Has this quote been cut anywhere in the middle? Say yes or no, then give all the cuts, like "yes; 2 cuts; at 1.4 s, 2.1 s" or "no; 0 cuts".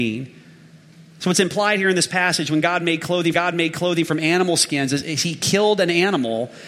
yes; 1 cut; at 3.3 s